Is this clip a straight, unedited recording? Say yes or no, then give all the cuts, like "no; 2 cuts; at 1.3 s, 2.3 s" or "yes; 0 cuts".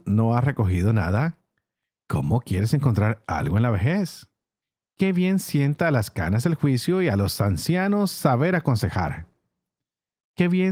yes; 0 cuts